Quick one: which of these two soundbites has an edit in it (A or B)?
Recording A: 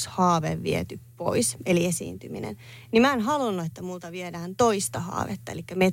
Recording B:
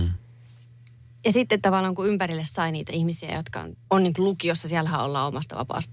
B